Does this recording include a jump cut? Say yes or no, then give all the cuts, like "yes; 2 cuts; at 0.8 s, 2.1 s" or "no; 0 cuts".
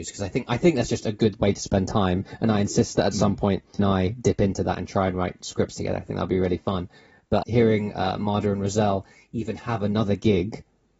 yes; 2 cuts; at 3.8 s, 7.4 s